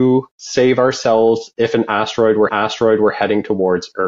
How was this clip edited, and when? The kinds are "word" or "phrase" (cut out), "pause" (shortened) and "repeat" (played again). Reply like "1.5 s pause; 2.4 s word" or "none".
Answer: 2.5 s repeat